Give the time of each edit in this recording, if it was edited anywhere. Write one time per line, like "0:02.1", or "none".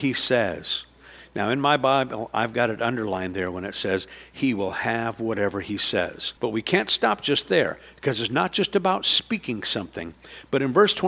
0:06.4